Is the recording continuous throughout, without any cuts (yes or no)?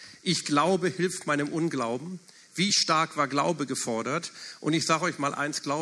yes